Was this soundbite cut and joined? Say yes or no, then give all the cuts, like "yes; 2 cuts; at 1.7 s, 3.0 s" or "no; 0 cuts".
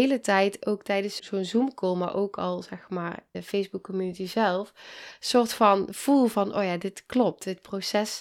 yes; 2 cuts; at 1.2 s, 3.3 s